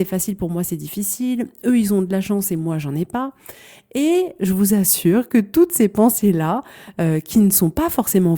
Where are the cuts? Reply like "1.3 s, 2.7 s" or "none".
none